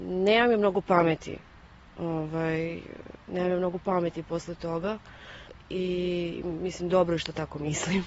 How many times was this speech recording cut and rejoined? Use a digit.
1